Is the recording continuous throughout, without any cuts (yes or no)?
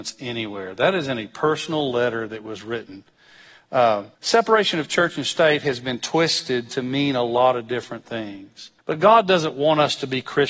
no